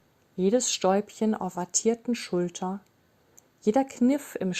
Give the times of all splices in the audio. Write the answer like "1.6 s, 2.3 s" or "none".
1.5 s